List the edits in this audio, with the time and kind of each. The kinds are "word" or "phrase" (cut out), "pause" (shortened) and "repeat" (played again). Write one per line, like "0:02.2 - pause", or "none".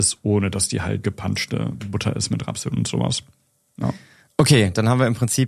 0:01.0 - word